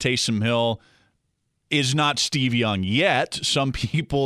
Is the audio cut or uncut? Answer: uncut